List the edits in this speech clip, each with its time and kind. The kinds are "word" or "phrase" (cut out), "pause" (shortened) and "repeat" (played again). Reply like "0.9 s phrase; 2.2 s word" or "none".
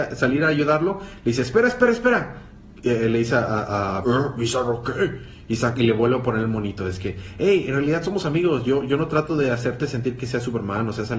4.0 s word